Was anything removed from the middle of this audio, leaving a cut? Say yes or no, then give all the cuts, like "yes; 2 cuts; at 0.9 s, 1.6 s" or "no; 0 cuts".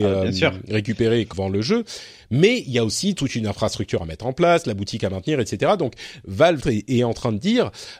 yes; 2 cuts; at 1.3 s, 6.6 s